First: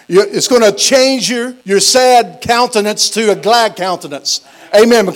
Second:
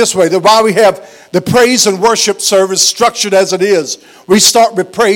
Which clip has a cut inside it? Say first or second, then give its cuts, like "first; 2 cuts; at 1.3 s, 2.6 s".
first; 1 cut; at 1.6 s